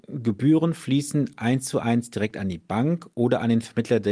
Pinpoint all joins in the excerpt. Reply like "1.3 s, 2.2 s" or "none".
1.4 s